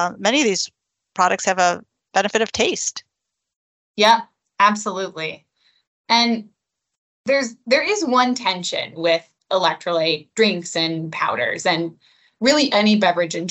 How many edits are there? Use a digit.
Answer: 0